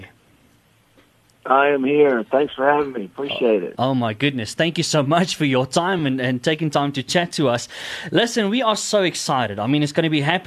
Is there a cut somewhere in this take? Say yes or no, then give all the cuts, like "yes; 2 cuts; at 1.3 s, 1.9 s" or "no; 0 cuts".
no; 0 cuts